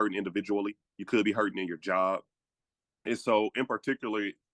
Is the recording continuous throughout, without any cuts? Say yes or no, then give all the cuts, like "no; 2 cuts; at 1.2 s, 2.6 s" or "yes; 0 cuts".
yes; 0 cuts